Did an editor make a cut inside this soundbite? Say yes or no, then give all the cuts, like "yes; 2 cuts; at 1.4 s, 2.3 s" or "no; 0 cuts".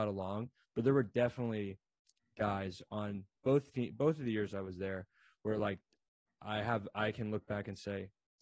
no; 0 cuts